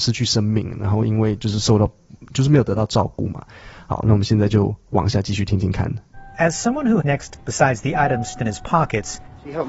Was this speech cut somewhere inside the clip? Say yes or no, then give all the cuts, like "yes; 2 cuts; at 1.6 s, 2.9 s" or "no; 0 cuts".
yes; 3 cuts; at 7.0 s, 7.3 s, 8.3 s